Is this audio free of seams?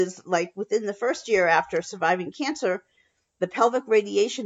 yes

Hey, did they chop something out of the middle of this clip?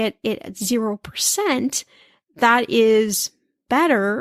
no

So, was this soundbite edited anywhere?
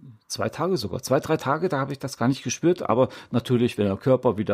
no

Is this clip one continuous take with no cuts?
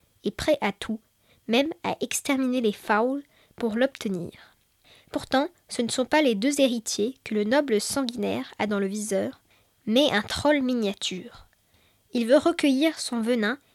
yes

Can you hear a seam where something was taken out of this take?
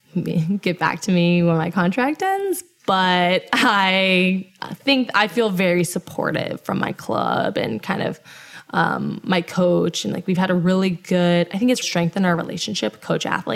yes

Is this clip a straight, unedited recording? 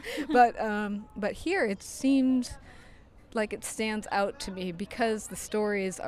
yes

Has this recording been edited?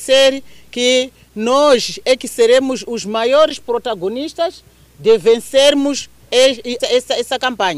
yes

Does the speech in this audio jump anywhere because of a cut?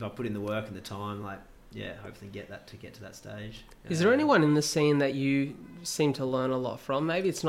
no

